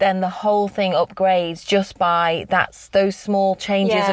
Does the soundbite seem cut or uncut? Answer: uncut